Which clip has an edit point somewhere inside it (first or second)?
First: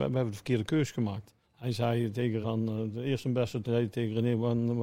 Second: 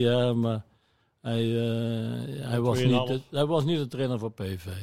first